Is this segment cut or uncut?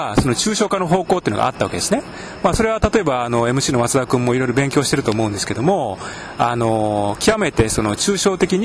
uncut